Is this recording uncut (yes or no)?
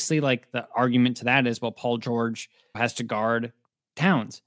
no